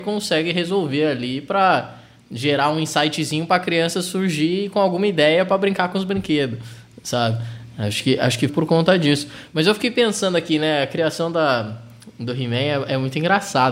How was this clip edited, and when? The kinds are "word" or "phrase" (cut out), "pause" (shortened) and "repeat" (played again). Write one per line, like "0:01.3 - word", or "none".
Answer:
0:08.5 - word